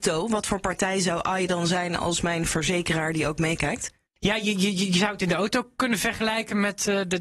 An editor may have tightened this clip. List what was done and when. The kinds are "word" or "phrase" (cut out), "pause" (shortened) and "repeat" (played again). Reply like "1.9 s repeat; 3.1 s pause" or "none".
4.1 s pause